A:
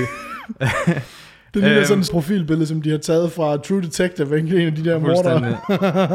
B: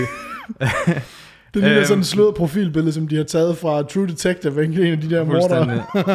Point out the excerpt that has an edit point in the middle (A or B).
A